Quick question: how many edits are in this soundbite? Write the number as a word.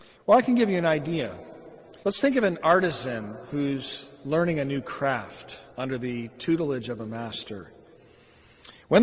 two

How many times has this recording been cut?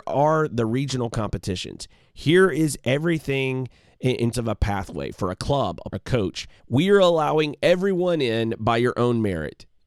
three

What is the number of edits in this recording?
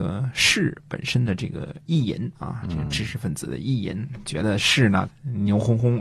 two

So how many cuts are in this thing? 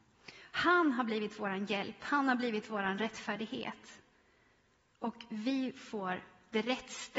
zero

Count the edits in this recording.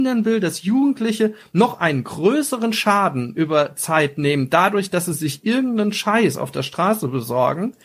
zero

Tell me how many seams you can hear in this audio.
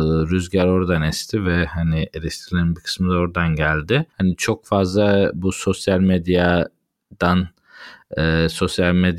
one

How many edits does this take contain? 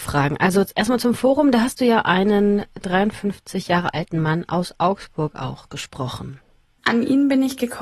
zero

